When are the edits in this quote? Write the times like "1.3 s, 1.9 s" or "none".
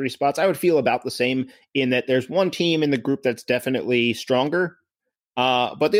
none